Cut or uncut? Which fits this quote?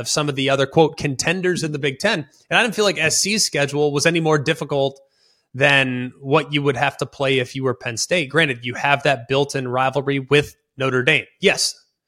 uncut